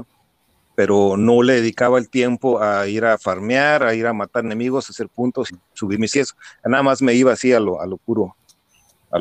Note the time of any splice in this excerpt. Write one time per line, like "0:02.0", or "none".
0:05.5
0:06.1

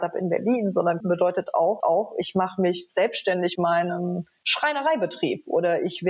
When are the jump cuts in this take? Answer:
0:01.0
0:01.8
0:03.5

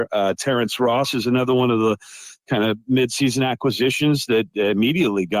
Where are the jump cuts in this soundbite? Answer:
none

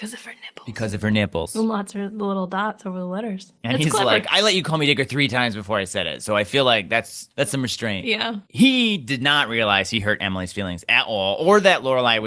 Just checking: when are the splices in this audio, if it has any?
0:08.5

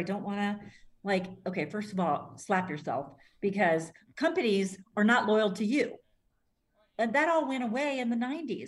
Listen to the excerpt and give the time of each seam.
none

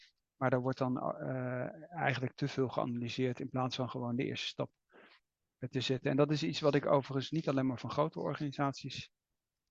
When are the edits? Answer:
none

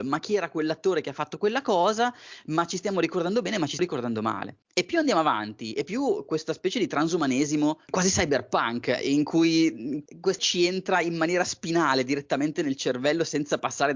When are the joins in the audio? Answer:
0:03.8
0:04.6
0:10.4

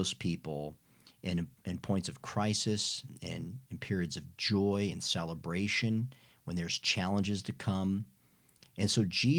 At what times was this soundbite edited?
none

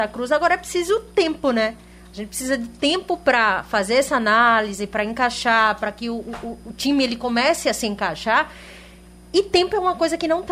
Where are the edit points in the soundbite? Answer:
none

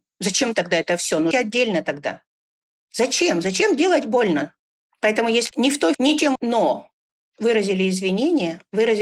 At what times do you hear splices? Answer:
0:01.3
0:05.5
0:05.9
0:06.4

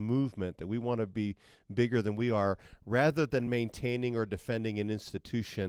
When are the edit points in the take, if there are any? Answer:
none

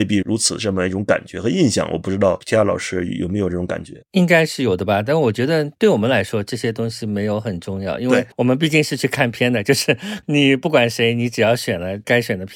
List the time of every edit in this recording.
0:08.3

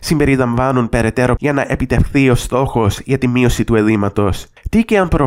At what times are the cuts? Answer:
0:01.4

